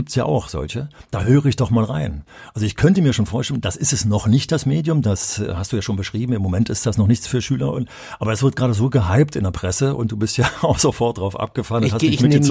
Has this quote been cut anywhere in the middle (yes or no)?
no